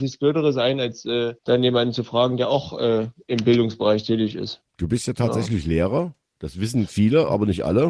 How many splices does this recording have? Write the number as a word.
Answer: one